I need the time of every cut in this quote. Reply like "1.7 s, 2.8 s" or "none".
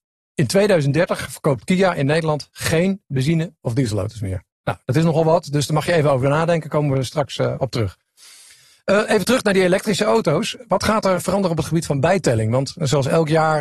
none